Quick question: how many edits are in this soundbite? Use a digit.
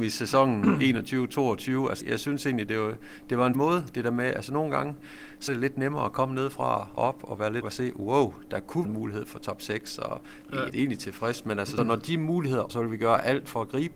9